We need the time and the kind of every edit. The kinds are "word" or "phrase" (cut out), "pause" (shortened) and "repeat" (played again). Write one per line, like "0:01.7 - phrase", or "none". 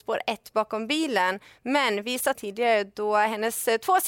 0:02.3 - phrase